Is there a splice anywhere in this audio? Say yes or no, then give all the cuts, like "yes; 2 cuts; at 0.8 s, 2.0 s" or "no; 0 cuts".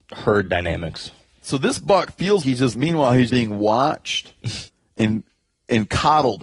yes; 4 cuts; at 2.4 s, 2.7 s, 3.3 s, 4.7 s